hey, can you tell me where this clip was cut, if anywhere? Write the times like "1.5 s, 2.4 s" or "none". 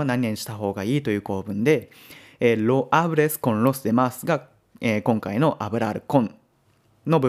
none